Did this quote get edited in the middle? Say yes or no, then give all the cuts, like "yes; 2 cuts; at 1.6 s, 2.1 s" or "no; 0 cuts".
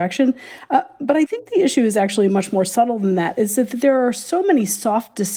no; 0 cuts